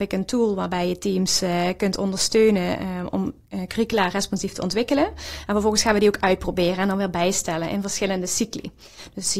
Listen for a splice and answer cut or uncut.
uncut